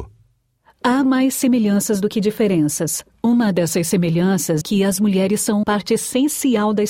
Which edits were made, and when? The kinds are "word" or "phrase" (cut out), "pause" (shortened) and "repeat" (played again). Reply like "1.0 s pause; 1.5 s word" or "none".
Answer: 1.0 s word; 4.6 s word; 5.6 s word